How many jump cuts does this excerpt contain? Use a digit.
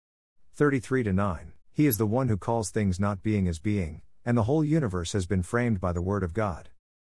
1